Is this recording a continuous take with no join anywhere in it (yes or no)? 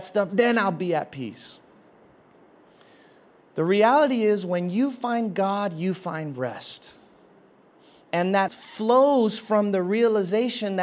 no